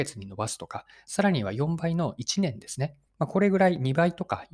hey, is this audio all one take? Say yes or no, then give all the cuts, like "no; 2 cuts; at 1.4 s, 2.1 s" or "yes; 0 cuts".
no; 1 cut; at 3.1 s